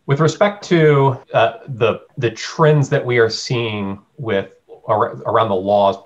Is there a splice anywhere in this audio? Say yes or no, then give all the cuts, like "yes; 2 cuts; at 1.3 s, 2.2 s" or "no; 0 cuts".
yes; 2 cuts; at 1.2 s, 2.1 s